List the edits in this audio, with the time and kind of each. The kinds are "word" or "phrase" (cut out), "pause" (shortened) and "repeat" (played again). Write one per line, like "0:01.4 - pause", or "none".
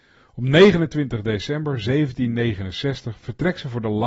none